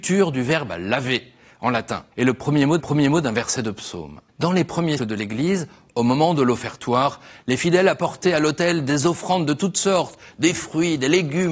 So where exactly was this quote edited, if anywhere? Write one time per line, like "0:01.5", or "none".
0:02.1
0:02.8
0:04.3
0:05.0